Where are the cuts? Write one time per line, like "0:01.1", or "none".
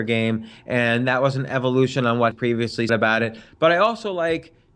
0:02.3
0:02.9